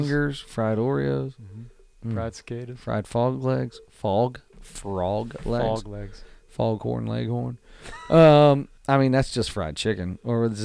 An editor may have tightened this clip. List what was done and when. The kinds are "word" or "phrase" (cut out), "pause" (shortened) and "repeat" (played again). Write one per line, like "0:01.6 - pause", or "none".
0:08.8 - pause